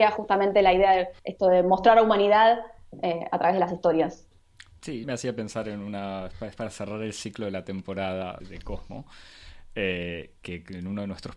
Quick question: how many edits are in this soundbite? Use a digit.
3